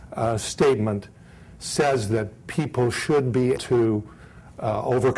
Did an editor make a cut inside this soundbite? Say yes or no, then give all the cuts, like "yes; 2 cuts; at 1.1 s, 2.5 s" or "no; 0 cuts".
yes; 1 cut; at 3.6 s